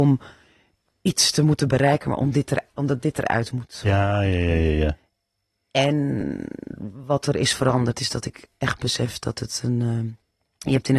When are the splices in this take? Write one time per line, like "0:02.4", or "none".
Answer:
none

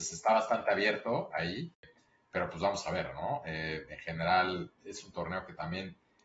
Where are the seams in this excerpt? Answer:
none

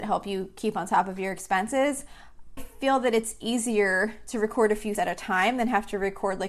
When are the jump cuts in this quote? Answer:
0:02.6
0:05.0

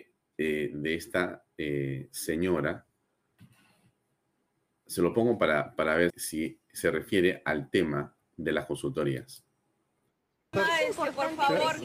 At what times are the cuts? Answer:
0:06.1

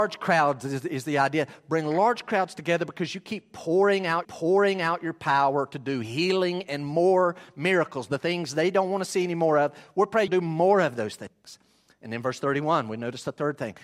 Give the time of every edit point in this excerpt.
0:04.2
0:10.3

